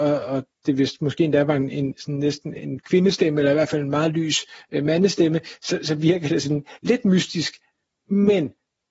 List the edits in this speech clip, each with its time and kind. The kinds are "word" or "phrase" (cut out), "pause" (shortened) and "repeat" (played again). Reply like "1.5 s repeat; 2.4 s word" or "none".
none

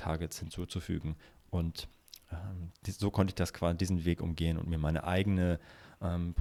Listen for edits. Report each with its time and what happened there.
none

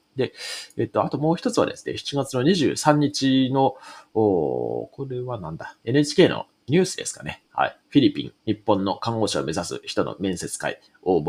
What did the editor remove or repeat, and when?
8.4 s pause

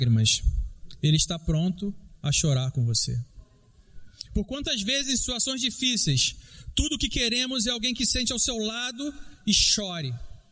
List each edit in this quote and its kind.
none

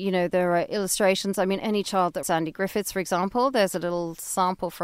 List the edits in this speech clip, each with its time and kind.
1.6 s word; 2.2 s word

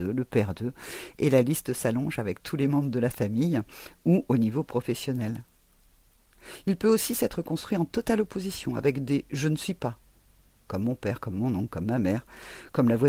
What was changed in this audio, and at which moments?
none

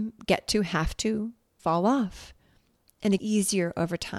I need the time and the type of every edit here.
1.6 s word; 3.2 s word

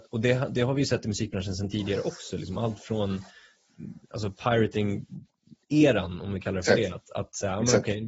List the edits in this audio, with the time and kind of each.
none

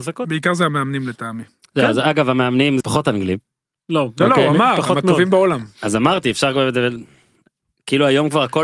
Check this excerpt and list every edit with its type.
2.8 s word

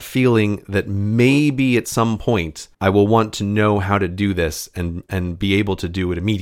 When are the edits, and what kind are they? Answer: 2.7 s pause

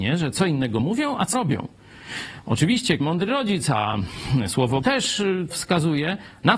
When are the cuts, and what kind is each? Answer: 1.3 s word; 3.0 s word; 4.8 s word; 5.5 s word

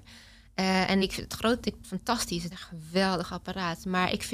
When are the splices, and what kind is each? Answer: 1.0 s word; 1.8 s phrase; 2.5 s word

